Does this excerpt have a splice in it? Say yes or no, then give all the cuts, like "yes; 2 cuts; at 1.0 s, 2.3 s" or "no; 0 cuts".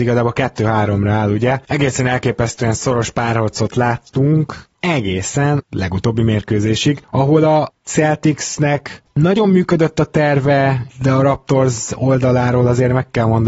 yes; 1 cut; at 5.6 s